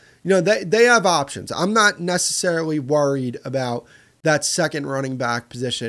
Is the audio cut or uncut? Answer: uncut